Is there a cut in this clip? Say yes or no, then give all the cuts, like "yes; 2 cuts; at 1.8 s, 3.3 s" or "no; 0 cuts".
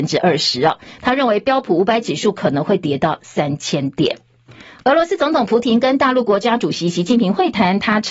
yes; 1 cut; at 4.5 s